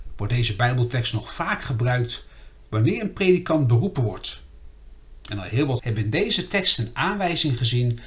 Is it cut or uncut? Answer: cut